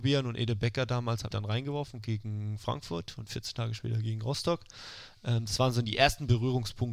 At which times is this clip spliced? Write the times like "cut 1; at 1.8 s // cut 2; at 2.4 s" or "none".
cut 1; at 1.3 s